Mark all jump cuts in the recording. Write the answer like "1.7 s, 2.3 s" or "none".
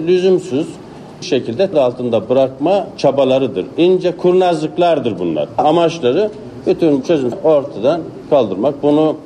1.2 s, 1.7 s, 7.0 s, 7.3 s